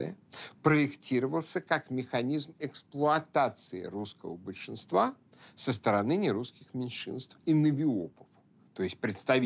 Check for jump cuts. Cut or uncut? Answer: uncut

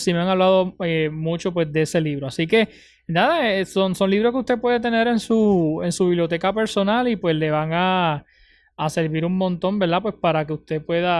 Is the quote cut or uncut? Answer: uncut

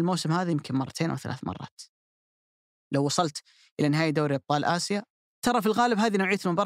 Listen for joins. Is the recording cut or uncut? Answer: uncut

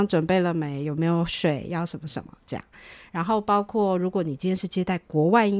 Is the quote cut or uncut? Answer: uncut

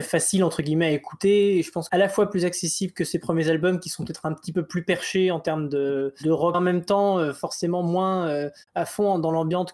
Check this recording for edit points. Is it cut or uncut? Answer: cut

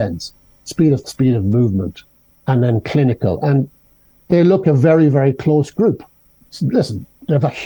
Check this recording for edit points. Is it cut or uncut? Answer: cut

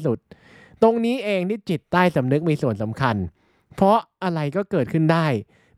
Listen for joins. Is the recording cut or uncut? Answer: uncut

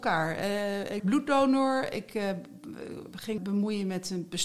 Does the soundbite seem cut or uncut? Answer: cut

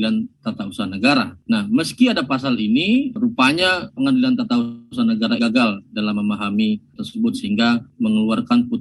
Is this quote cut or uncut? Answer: cut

